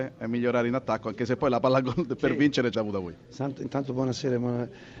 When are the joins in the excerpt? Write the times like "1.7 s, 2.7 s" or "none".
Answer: 2.7 s